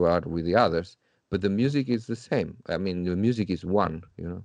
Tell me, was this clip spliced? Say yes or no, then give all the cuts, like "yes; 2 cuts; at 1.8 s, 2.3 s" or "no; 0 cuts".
no; 0 cuts